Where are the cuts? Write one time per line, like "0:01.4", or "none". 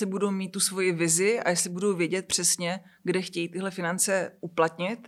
none